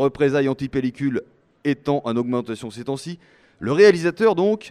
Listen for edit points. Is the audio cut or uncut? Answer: uncut